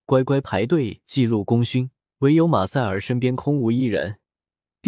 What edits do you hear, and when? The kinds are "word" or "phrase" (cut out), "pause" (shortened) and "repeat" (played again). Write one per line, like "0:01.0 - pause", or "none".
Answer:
0:02.0 - pause